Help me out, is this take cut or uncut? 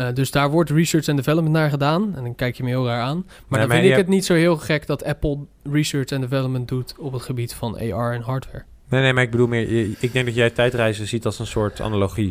uncut